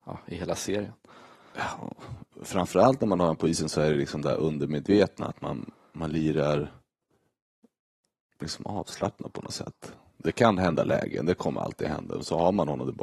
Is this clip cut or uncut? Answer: uncut